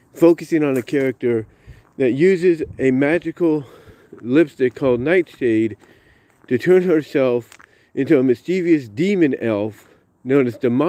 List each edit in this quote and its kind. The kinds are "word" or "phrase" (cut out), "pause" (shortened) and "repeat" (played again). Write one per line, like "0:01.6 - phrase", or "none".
none